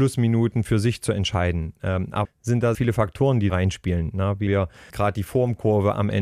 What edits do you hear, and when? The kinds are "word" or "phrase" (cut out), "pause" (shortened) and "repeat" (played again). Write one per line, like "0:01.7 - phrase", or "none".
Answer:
0:02.2 - word
0:02.7 - word
0:03.5 - word
0:04.5 - word
0:04.9 - word